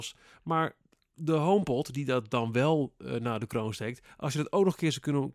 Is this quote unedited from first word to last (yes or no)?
yes